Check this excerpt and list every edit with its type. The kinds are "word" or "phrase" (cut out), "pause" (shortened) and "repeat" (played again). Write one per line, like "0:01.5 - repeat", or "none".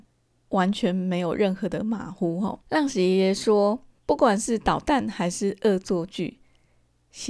0:02.6 - pause
0:04.0 - pause